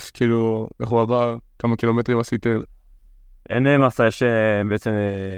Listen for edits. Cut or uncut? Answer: uncut